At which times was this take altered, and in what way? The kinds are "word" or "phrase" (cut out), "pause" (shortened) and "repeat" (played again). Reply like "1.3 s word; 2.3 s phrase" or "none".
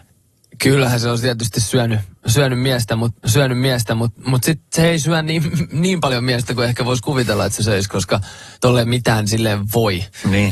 3.2 s repeat; 8.5 s pause